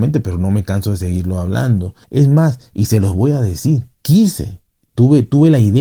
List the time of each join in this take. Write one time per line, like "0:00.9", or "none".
none